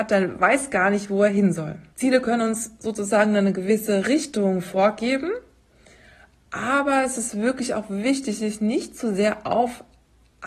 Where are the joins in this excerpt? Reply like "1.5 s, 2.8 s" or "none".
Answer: 1.9 s